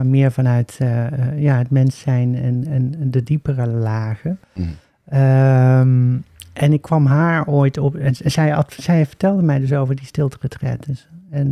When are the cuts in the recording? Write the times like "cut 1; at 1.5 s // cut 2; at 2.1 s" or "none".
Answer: cut 1; at 4.4 s